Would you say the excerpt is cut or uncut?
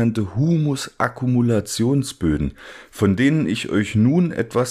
uncut